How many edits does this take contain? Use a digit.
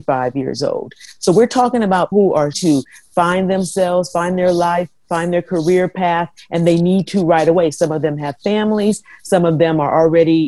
2